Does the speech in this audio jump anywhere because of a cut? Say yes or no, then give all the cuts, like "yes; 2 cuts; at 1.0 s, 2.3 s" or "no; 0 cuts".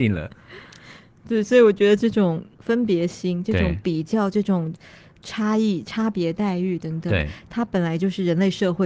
no; 0 cuts